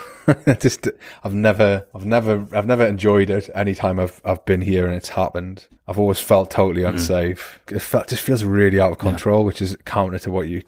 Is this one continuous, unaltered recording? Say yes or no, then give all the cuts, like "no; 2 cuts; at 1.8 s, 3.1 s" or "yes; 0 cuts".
no; 1 cut; at 5.8 s